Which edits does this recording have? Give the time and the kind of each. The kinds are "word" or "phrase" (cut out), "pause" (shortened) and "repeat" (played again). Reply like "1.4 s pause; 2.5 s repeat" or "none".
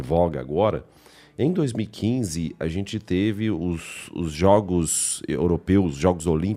none